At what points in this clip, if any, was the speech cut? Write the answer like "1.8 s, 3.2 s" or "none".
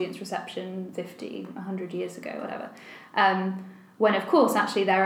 0.9 s